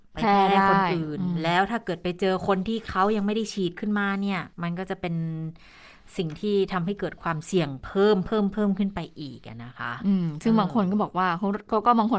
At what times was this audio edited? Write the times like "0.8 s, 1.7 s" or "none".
4.5 s